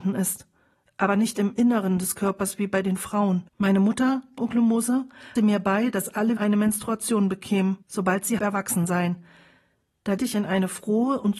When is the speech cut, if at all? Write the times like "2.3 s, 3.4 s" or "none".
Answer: 3.5 s, 4.4 s, 5.4 s, 6.4 s, 7.8 s, 8.4 s, 10.2 s